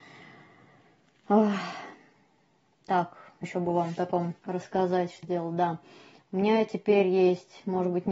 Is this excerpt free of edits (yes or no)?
no